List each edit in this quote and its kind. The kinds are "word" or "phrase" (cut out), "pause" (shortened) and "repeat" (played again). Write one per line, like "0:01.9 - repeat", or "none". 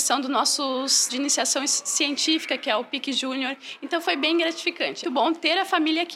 0:01.1 - word
0:05.0 - word